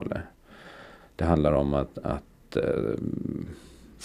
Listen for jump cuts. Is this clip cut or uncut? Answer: uncut